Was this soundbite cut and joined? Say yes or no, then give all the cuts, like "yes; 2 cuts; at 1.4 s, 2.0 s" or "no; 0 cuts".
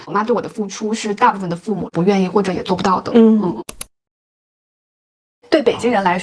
no; 0 cuts